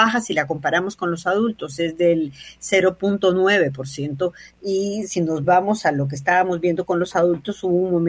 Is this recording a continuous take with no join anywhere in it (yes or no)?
yes